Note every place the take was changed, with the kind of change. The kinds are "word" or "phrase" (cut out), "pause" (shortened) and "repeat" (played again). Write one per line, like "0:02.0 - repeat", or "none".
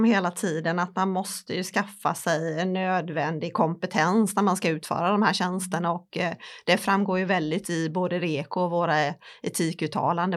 0:07.6 - word

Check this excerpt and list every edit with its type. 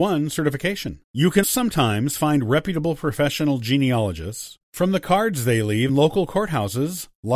0:01.0 - pause
0:01.4 - word
0:04.6 - pause
0:05.9 - word

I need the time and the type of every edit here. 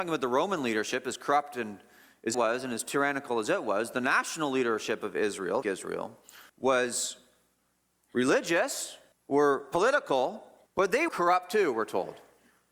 0:02.3 - word
0:05.6 - word
0:06.5 - pause
0:09.1 - pause
0:10.7 - pause
0:11.1 - word

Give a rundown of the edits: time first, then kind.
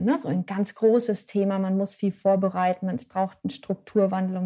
none

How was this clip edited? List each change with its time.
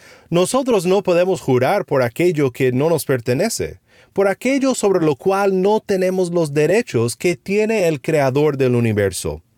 none

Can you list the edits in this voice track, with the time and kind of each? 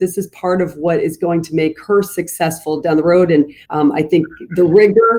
0:03.6 - pause

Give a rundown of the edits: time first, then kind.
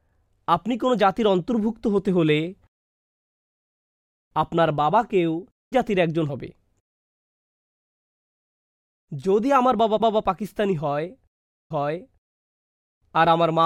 0:05.7 - word
0:06.3 - word
0:10.0 - repeat
0:11.7 - repeat

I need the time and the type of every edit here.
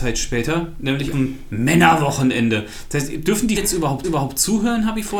0:01.1 - word
0:03.6 - word
0:04.0 - repeat

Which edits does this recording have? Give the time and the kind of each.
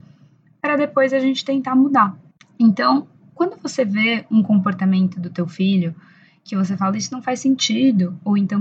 0:02.3 - pause

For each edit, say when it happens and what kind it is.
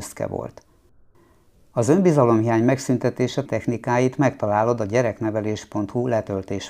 0:03.5 - word

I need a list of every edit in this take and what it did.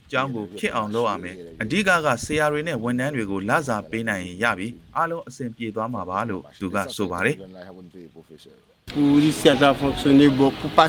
none

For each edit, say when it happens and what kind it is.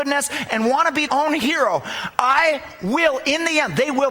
0:01.1 - word
0:02.1 - word

